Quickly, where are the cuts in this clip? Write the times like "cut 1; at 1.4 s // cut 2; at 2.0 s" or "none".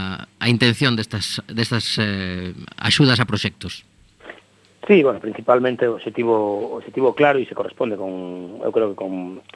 none